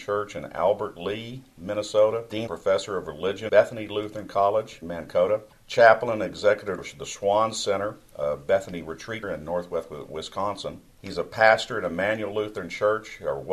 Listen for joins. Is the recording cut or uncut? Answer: cut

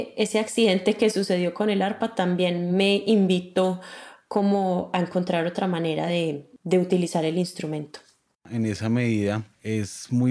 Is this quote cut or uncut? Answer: uncut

